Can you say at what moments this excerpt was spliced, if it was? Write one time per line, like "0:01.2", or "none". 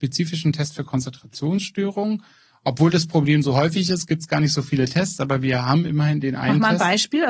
none